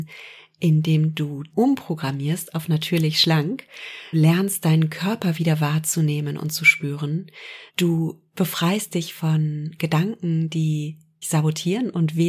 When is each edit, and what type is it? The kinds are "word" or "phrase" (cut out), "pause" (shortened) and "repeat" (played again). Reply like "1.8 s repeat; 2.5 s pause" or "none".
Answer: 1.5 s phrase; 4.1 s word; 7.7 s pause; 11.2 s word